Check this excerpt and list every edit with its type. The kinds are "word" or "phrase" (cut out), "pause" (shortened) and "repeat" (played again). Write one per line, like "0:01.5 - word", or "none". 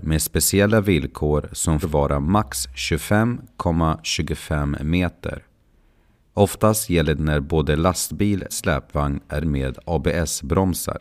0:01.8 - word
0:07.2 - word
0:08.5 - word
0:09.4 - word